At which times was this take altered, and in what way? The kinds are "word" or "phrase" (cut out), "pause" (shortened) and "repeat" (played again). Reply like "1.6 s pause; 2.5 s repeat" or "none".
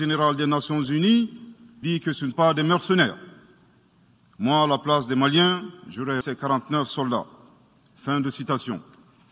1.8 s word; 2.3 s word; 6.2 s word